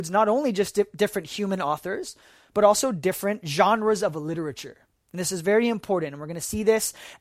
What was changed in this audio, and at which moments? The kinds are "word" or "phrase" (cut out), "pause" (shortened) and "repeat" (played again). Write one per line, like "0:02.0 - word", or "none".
none